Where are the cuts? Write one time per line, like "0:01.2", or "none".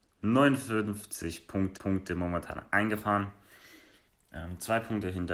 0:01.8

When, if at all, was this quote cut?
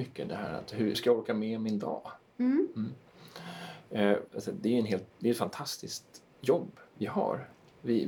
0:00.9
0:04.3
0:05.1

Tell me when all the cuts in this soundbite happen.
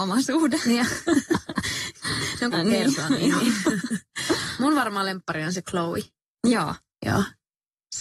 0:02.5

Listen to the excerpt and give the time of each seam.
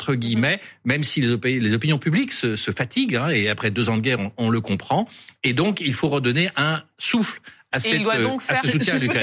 none

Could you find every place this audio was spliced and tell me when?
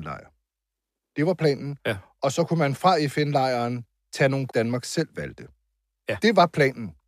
0:04.5

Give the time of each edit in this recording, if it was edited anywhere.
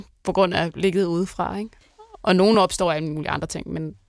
none

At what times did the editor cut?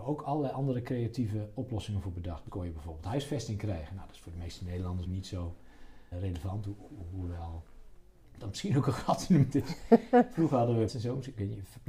0:02.5
0:05.1
0:06.1
0:09.5
0:10.9

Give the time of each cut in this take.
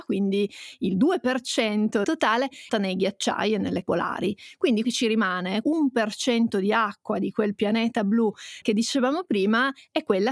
0:02.0
0:02.7
0:03.8
0:04.8
0:05.6
0:08.6

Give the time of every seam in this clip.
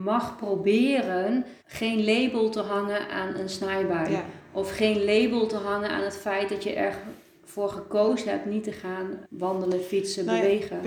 0:01.6
0:09.2

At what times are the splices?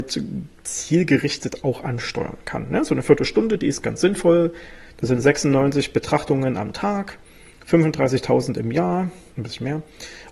none

